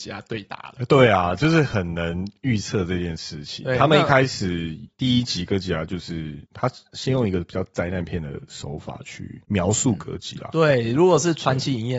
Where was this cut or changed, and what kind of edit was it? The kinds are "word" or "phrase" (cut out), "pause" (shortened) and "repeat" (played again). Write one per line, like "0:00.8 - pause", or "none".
0:04.9 - pause
0:06.5 - pause
0:09.4 - pause